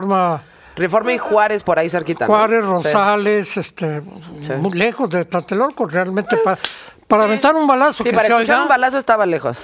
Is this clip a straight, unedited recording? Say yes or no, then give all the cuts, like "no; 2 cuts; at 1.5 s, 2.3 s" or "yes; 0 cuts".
yes; 0 cuts